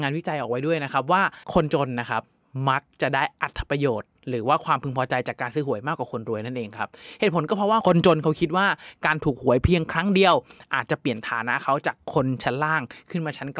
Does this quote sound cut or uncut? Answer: cut